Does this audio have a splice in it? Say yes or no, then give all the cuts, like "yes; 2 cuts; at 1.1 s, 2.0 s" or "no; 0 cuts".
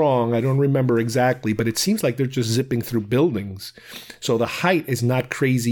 no; 0 cuts